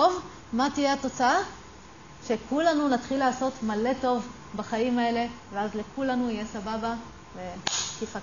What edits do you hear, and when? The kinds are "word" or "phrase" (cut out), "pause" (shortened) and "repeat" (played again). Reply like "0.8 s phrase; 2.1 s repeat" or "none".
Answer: none